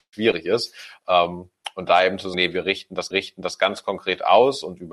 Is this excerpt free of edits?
no; 2 cuts; at 2.3 s, 3.1 s

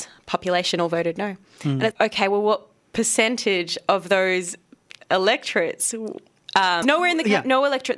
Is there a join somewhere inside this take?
yes; 2 cuts; at 1.9 s, 6.8 s

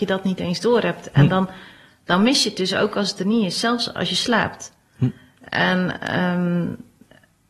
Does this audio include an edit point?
no; 0 cuts

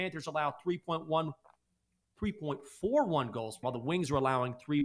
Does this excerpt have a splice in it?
yes; 1 cut; at 3.6 s

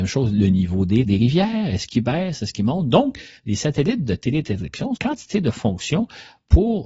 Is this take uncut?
no; 2 cuts; at 1.0 s, 5.0 s

